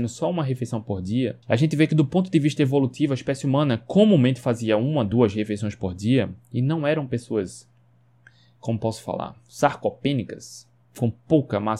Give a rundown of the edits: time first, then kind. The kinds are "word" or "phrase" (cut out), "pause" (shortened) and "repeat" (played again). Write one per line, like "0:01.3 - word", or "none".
0:01.4 - pause